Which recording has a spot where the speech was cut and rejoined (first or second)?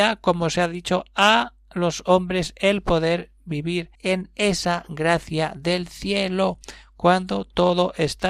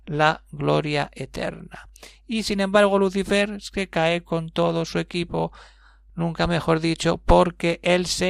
first